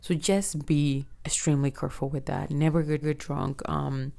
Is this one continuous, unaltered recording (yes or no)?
no